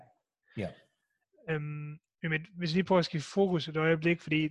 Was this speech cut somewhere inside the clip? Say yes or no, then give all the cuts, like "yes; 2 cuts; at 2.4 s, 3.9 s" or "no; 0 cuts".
no; 0 cuts